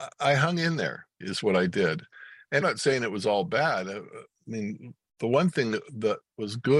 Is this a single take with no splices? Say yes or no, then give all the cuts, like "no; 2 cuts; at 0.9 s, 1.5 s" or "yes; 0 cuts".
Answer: no; 2 cuts; at 1.2 s, 2.6 s